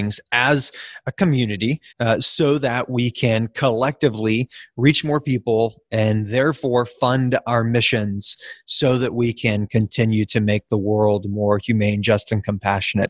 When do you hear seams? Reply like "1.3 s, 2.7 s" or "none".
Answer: 1.9 s

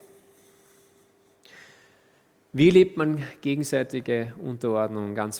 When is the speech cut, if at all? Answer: none

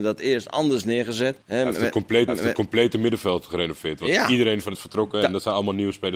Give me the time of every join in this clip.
1.4 s, 2.3 s, 4.7 s

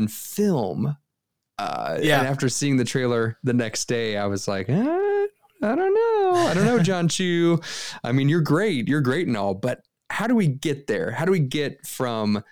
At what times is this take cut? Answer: none

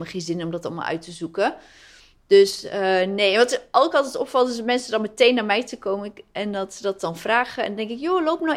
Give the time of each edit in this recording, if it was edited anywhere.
none

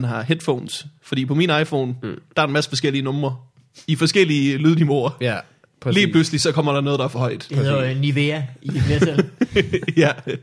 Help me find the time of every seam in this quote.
none

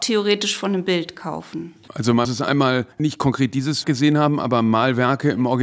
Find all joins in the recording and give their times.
2.2 s, 2.9 s, 3.8 s

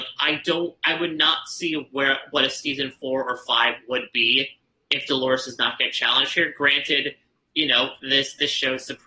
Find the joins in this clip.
none

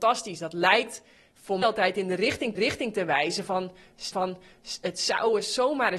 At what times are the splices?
1.6 s, 2.6 s, 4.1 s

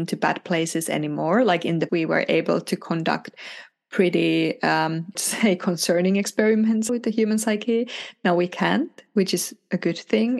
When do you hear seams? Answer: 1.9 s, 5.1 s, 6.9 s

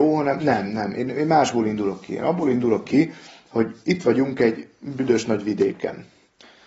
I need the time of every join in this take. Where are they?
none

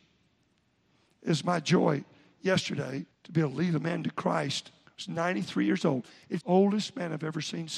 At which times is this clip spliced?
3.1 s, 4.9 s, 6.4 s

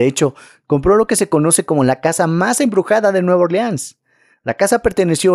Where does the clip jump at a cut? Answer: none

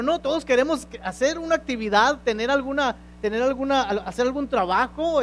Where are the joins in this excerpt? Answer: none

